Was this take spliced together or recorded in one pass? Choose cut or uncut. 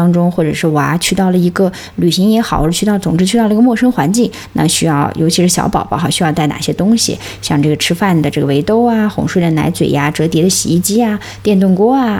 uncut